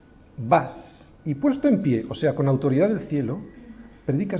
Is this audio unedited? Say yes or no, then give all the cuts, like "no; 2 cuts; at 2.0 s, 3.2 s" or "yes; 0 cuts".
no; 1 cut; at 1.2 s